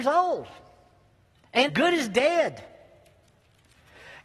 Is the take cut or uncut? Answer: cut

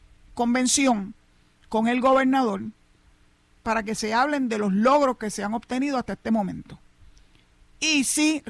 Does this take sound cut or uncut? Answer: uncut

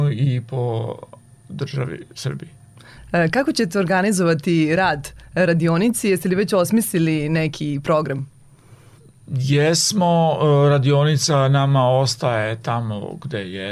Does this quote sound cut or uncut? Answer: uncut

